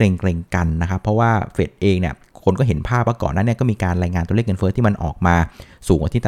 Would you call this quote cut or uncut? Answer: uncut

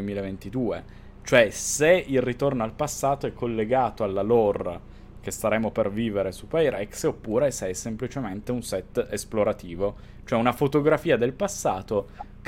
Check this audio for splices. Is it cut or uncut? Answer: uncut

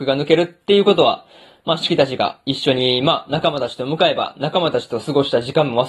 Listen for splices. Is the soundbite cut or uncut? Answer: uncut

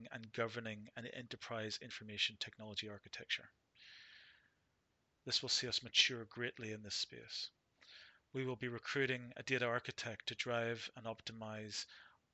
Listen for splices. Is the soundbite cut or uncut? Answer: uncut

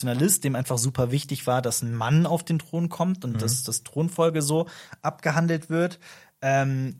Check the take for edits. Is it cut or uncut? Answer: uncut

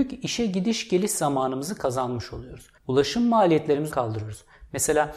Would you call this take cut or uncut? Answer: cut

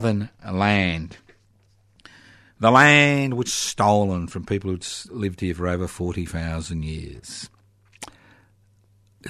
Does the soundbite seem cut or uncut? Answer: cut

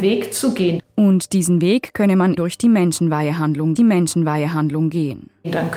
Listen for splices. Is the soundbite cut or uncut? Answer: cut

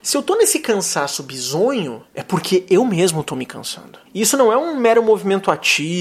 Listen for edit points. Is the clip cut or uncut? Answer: cut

